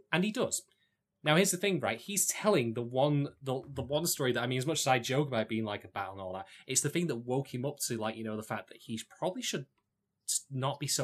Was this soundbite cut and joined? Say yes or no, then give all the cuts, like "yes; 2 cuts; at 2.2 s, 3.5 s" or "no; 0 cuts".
no; 0 cuts